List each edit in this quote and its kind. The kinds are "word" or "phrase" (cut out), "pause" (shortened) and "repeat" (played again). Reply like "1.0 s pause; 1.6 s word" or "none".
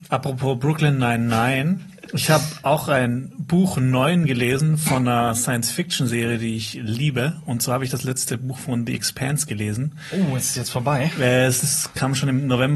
none